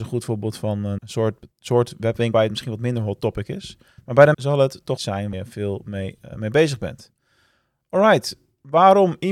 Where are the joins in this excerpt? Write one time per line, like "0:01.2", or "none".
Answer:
0:01.0
0:02.3
0:04.0
0:04.3
0:05.0
0:05.3

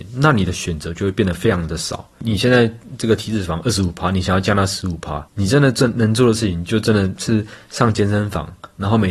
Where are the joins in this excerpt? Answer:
0:05.3

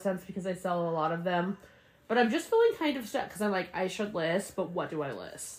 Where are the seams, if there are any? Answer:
none

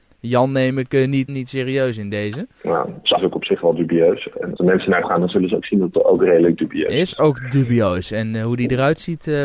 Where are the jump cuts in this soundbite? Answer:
0:01.3
0:03.2
0:04.6
0:05.0
0:05.9

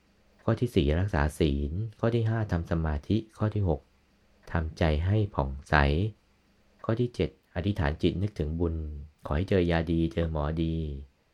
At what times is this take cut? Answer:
0:09.1

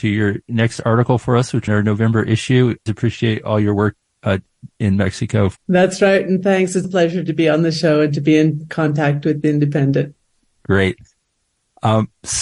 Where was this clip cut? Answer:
0:01.7
0:02.9
0:05.6
0:06.8

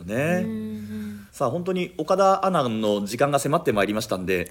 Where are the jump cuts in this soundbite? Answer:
0:01.3

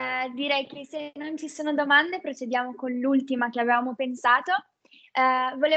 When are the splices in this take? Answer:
none

